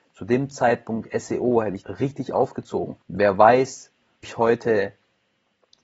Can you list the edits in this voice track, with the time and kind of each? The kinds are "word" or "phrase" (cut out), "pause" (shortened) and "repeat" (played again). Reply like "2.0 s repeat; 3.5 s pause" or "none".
1.8 s word; 3.0 s pause; 4.2 s word

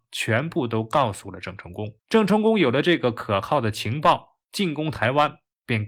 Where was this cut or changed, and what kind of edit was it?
2.0 s pause

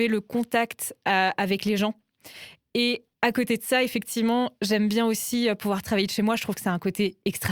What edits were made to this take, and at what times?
none

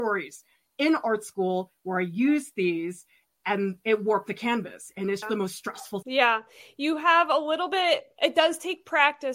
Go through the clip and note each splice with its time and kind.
5.2 s word; 6.0 s word

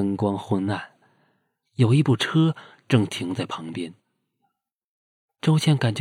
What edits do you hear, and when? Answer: none

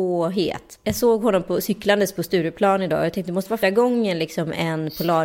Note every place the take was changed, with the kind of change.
3.6 s word

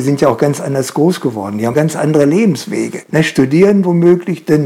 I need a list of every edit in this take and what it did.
1.7 s word

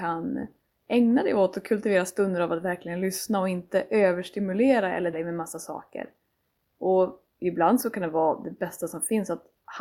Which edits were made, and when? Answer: 5.1 s word; 7.3 s pause

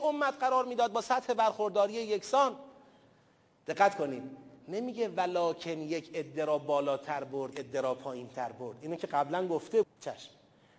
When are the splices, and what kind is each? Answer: 7.5 s word; 9.8 s word

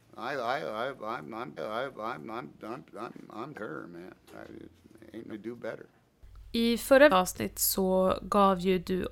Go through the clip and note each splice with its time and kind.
1.6 s repeat; 3.5 s phrase; 5.3 s word; 7.1 s word

